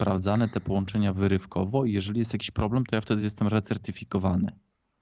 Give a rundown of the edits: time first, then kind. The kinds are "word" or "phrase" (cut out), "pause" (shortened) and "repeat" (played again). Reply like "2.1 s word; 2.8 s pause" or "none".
none